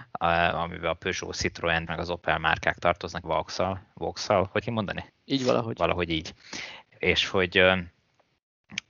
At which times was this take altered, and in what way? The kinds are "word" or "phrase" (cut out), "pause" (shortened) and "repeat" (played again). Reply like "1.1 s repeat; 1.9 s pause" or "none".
1.9 s word; 3.2 s phrase; 4.6 s word; 5.1 s pause